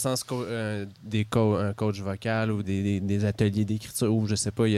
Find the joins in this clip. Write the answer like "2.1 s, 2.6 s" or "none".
2.6 s